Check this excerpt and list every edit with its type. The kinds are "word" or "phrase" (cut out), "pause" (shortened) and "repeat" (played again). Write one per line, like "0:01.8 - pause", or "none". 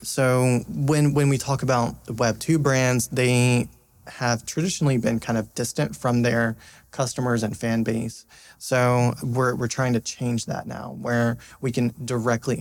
0:09.2 - word